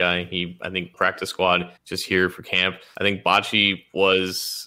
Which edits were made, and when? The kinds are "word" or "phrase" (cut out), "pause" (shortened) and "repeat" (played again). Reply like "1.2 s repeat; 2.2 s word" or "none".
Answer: 0.9 s phrase; 1.8 s pause